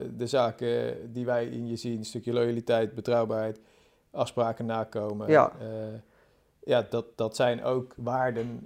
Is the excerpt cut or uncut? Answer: uncut